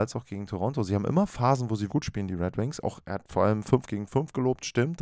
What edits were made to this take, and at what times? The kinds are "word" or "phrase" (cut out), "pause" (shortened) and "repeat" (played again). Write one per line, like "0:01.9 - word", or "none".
0:01.9 - word